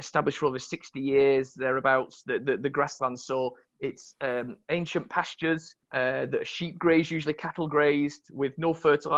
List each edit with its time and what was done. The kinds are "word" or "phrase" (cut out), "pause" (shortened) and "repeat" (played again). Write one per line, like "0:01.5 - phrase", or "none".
0:05.8 - pause